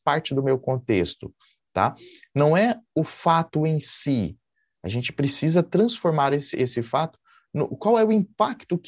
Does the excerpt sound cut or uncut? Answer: uncut